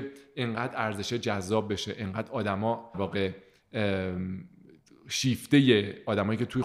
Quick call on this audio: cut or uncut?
cut